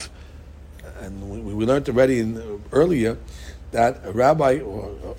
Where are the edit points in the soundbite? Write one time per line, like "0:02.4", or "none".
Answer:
none